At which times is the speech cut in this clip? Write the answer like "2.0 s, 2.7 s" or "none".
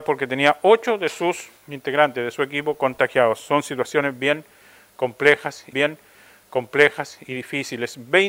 1.6 s, 5.7 s